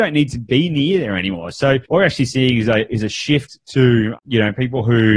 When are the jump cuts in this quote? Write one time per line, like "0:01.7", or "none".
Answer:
0:01.9